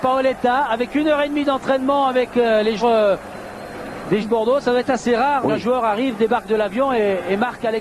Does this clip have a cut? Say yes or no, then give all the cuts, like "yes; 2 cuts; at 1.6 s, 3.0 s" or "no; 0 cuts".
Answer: yes; 3 cuts; at 2.8 s, 4.2 s, 5.4 s